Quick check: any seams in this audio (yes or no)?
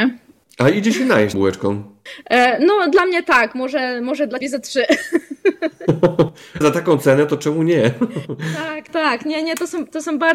yes